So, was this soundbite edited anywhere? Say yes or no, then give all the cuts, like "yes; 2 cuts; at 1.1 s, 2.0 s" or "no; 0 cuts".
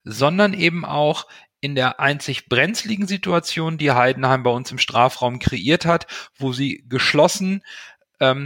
no; 0 cuts